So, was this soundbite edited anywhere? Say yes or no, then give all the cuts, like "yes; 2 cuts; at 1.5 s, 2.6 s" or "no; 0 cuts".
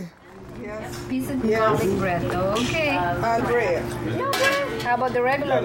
yes; 2 cuts; at 1.4 s, 3.4 s